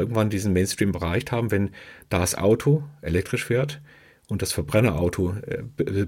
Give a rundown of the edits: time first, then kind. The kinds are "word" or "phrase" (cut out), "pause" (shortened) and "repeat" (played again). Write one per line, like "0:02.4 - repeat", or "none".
none